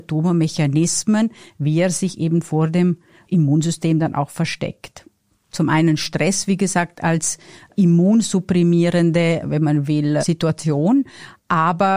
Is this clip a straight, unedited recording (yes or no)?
yes